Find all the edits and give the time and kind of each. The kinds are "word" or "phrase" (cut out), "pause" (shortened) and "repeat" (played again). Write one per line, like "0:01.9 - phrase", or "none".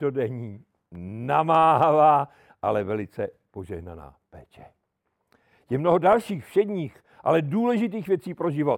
none